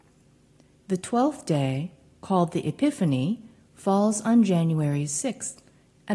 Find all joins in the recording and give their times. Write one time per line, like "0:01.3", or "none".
none